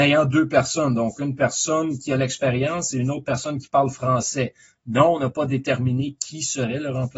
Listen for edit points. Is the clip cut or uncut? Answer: uncut